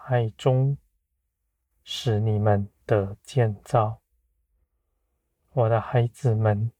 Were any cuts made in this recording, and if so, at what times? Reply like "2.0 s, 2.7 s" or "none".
none